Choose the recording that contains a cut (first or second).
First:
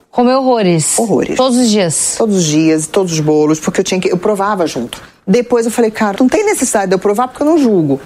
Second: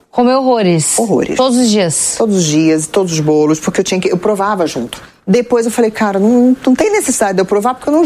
first